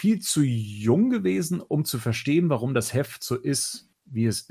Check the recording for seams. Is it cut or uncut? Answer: uncut